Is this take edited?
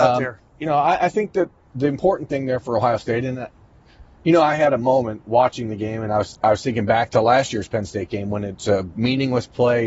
no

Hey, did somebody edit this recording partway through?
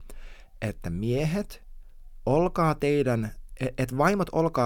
no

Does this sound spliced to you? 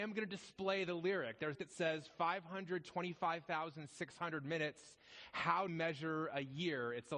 yes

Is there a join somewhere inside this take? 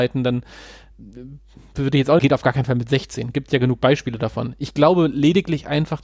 yes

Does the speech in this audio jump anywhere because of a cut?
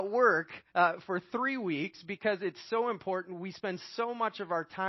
no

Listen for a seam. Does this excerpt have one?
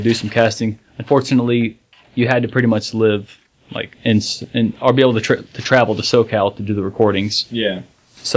no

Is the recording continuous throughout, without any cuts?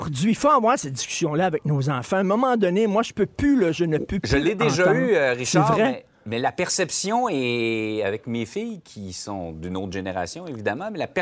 yes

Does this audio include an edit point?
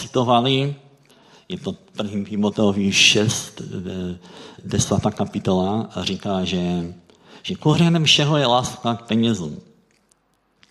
yes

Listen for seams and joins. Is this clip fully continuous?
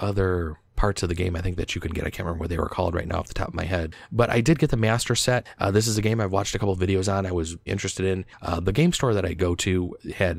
no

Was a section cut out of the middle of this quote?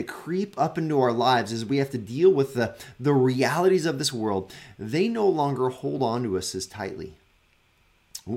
no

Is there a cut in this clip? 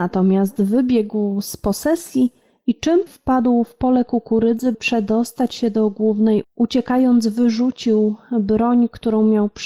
yes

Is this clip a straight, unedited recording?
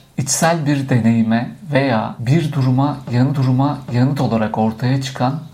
no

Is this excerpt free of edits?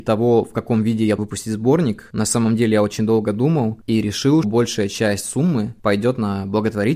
no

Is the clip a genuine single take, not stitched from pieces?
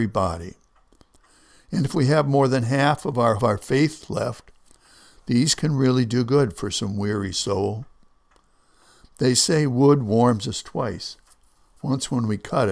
no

